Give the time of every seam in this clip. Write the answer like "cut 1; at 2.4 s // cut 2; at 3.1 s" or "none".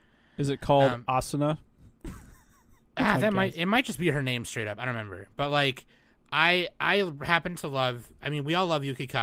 none

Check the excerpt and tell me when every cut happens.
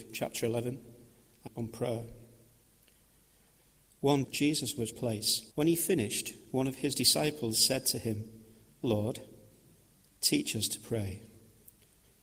cut 1; at 1.5 s // cut 2; at 4.2 s // cut 3; at 4.9 s // cut 4; at 5.5 s

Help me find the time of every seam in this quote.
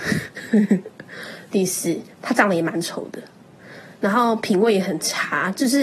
cut 1; at 2.1 s

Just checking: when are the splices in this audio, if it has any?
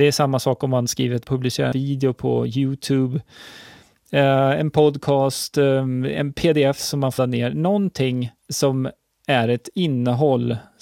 cut 1; at 1.2 s // cut 2; at 1.7 s // cut 3; at 7.2 s // cut 4; at 8.4 s

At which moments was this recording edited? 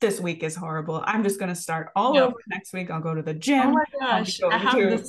none

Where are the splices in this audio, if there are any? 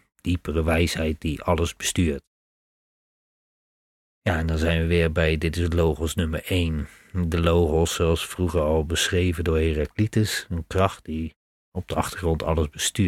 none

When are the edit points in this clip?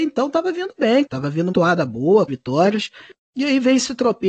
cut 1; at 1.1 s // cut 2; at 1.5 s // cut 3; at 2.3 s

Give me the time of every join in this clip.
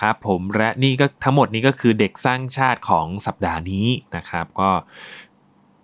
cut 1; at 4.1 s

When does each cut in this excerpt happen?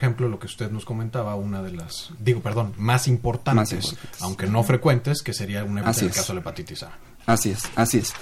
cut 1; at 2.2 s // cut 2; at 5.8 s

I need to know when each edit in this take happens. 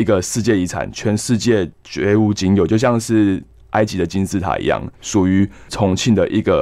cut 1; at 4.9 s

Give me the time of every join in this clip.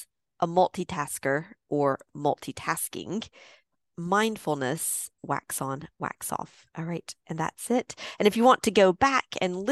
cut 1; at 5.2 s // cut 2; at 6.7 s // cut 3; at 7.2 s

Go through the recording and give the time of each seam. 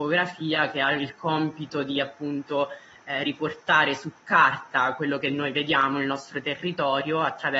none

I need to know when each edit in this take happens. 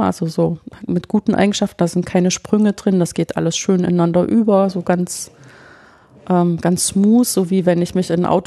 none

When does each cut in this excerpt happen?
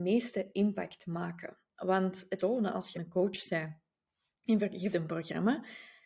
cut 1; at 2.4 s // cut 2; at 2.9 s // cut 3; at 4.9 s

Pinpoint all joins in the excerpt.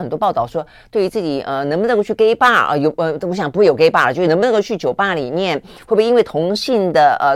none

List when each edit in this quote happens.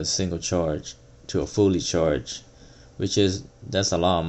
none

